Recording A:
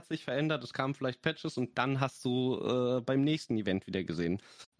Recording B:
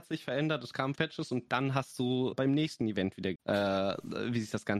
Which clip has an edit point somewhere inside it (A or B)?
B